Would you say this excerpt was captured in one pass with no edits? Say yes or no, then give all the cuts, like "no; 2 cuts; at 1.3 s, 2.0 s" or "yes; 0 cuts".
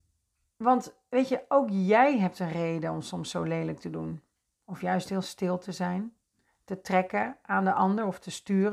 yes; 0 cuts